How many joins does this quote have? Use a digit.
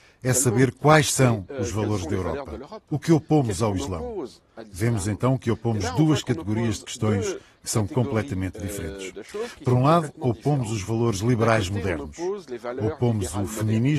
0